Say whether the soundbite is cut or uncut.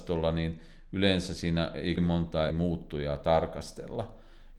cut